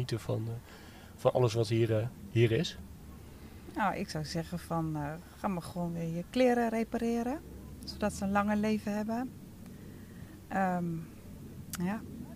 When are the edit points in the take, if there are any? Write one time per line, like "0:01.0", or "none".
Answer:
none